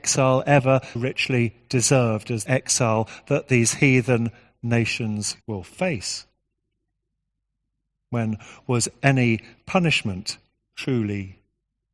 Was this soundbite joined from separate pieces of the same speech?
yes; 4 cuts; at 1.0 s, 2.5 s, 5.4 s, 10.6 s

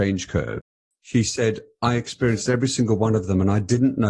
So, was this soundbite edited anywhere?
no; 0 cuts

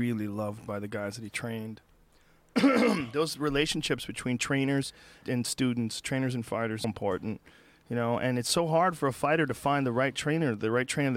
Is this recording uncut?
no; 2 cuts; at 5.2 s, 6.8 s

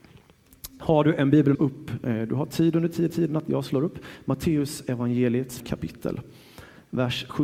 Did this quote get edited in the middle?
yes; 3 cuts; at 1.5 s, 3.1 s, 5.6 s

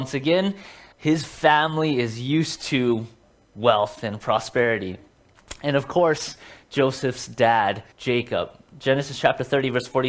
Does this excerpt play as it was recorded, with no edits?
no; 2 cuts; at 0.9 s, 7.9 s

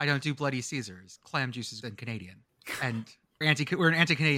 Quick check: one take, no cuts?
no; 3 cuts; at 1.2 s, 1.8 s, 3.4 s

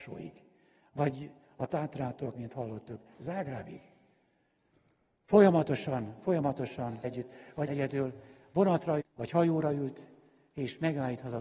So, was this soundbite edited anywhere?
yes; 4 cuts; at 2.3 s, 7.0 s, 7.7 s, 9.0 s

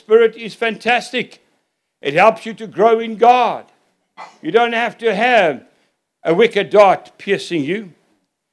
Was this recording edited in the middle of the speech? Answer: no; 0 cuts

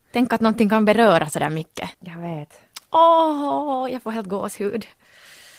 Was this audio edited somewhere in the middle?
yes; 1 cut; at 1.9 s

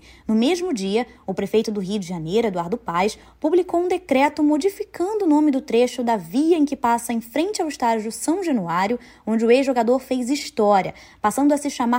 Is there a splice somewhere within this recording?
no; 0 cuts

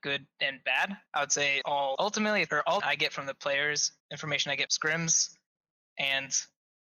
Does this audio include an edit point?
yes; 7 cuts; at 1.1 s, 1.6 s, 2.0 s, 2.5 s, 2.8 s, 4.0 s, 4.7 s

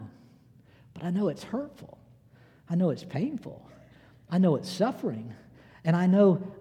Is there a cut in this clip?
no; 0 cuts

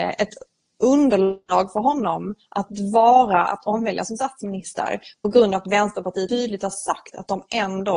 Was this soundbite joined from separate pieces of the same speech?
yes; 1 cut; at 6.3 s

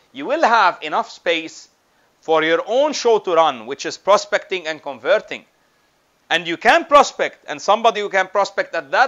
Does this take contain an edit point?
no; 0 cuts

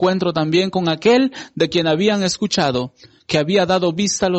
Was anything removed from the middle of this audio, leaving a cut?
no; 0 cuts

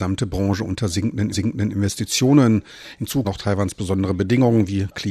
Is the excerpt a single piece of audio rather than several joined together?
no; 2 cuts; at 1.3 s, 3.2 s

